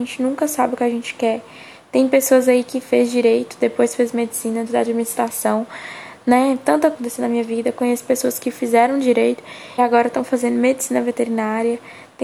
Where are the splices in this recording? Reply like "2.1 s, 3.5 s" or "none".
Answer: 4.7 s, 6.9 s, 9.8 s